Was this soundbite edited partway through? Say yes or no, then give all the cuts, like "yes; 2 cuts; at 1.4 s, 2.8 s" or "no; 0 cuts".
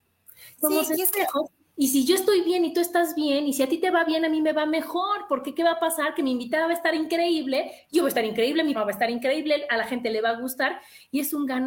yes; 1 cut; at 8.7 s